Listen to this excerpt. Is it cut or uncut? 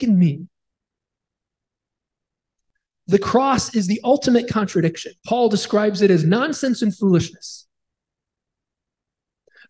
cut